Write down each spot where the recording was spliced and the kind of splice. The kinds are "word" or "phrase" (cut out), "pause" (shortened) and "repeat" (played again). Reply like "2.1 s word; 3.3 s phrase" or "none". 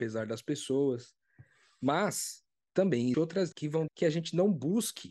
3.1 s word; 3.5 s word; 3.9 s word